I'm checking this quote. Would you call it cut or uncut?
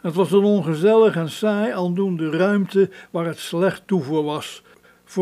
uncut